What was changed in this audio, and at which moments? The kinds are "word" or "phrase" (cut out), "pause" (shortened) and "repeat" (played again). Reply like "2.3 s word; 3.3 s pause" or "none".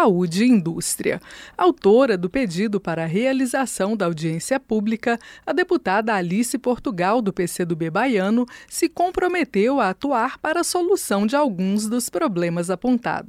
none